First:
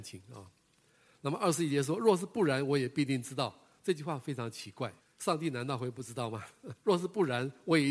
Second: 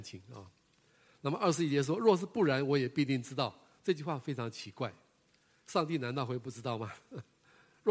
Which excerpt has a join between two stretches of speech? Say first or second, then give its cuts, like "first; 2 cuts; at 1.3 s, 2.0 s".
first; 2 cuts; at 5.0 s, 6.8 s